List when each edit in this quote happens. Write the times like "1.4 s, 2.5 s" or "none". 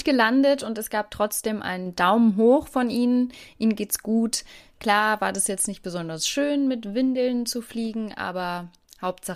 none